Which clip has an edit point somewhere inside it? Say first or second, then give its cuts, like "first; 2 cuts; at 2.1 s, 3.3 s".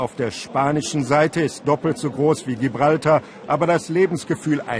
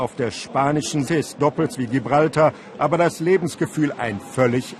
second; 2 cuts; at 1.1 s, 1.7 s